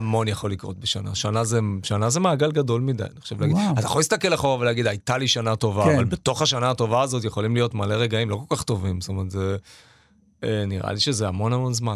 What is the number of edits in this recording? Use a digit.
0